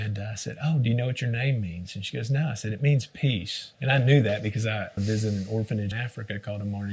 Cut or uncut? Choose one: cut